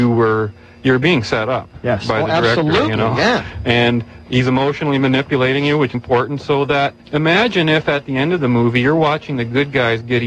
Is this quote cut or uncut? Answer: cut